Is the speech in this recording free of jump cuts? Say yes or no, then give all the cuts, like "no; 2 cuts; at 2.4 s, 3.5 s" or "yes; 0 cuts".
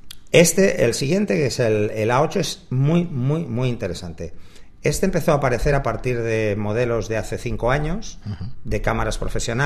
yes; 0 cuts